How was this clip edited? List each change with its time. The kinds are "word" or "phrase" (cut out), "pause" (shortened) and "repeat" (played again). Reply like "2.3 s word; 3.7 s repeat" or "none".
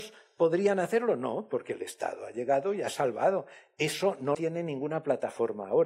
4.3 s word